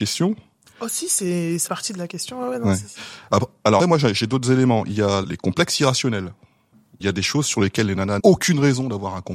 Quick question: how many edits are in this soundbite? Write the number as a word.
five